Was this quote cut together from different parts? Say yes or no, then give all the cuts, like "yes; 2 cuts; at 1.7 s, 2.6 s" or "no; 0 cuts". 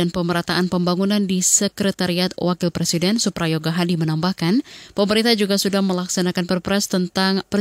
no; 0 cuts